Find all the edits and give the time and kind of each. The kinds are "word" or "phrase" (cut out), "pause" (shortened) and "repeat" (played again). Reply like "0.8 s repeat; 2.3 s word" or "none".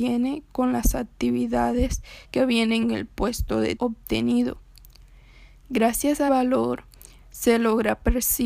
2.2 s pause; 2.8 s phrase; 3.8 s word; 6.3 s word

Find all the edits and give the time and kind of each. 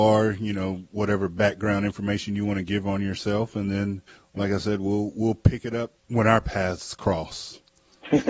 4.1 s pause; 6.0 s pause

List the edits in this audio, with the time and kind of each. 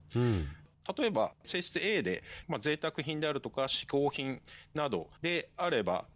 none

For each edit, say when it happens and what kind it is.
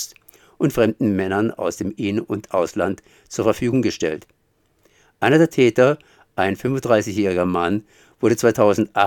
none

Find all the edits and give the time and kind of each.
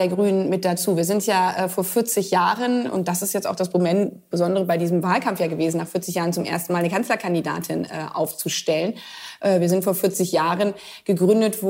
none

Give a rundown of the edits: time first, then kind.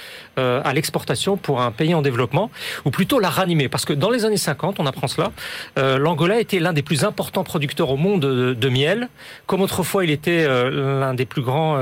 none

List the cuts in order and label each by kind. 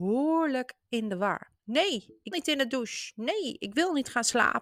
1.6 s pause; 2.3 s word

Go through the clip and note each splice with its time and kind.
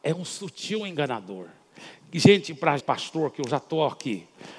2.8 s phrase

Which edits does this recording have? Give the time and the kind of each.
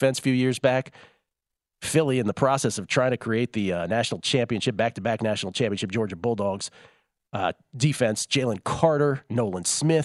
none

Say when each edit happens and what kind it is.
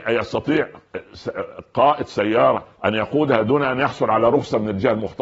none

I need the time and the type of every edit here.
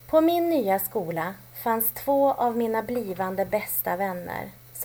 none

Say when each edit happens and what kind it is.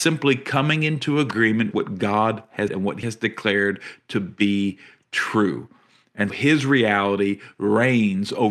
1.7 s word; 2.7 s word; 3.0 s word; 6.3 s word

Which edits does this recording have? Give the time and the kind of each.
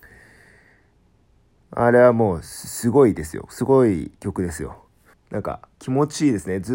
5.1 s pause; 5.7 s pause

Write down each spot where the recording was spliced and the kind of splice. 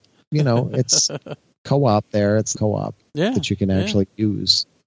2.5 s word

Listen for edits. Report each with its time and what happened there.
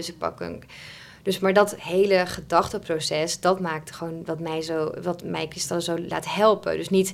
none

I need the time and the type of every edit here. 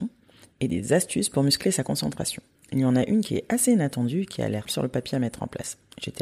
2.5 s pause; 4.6 s word

